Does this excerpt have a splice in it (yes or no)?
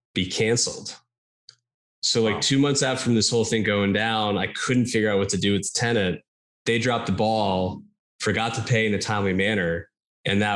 no